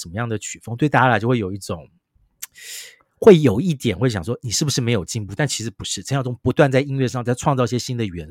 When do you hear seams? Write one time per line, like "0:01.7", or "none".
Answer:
none